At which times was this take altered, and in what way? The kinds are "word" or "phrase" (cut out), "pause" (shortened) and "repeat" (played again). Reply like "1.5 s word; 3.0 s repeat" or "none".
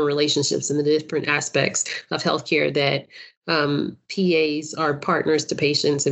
none